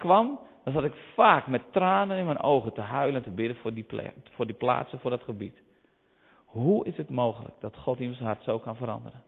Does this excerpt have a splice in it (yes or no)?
no